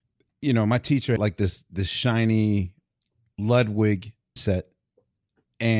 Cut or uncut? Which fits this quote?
cut